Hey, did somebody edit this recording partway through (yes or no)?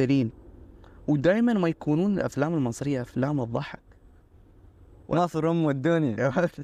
no